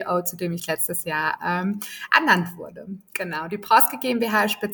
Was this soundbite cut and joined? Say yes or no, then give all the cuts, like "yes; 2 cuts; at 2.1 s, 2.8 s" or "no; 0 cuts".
no; 0 cuts